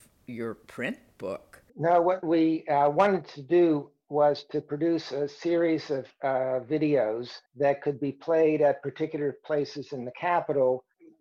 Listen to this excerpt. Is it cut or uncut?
cut